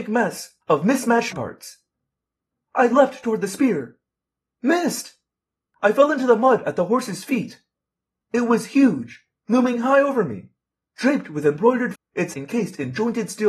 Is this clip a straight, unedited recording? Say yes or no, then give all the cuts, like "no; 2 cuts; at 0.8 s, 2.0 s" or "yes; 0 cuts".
no; 3 cuts; at 1.3 s, 11.9 s, 12.3 s